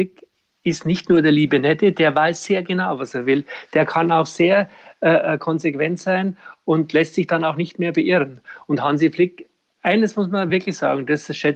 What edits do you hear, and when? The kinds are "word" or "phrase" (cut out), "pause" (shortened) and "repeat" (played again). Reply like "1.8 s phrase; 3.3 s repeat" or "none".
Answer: none